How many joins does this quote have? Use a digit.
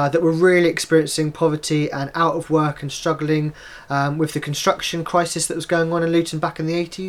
0